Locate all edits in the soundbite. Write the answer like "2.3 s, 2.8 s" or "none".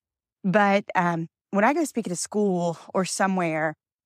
none

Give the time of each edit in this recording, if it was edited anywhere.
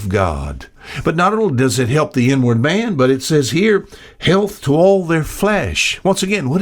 none

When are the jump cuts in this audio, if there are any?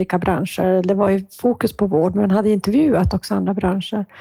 none

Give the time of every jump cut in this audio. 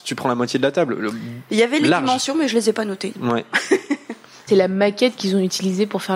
4.5 s

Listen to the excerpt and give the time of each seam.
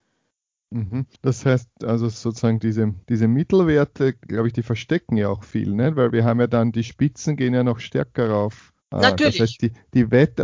1.1 s, 3.0 s, 8.8 s

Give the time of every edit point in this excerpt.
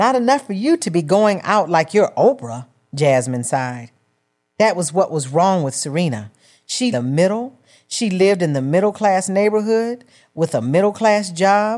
6.9 s

